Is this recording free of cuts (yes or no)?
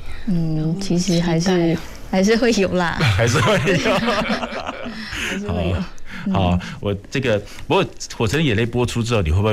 yes